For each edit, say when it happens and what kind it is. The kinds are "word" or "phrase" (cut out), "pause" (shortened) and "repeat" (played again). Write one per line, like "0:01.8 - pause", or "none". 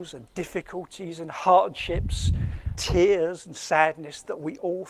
0:02.7 - word